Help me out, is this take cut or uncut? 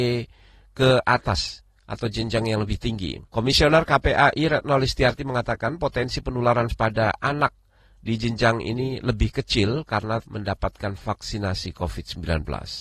cut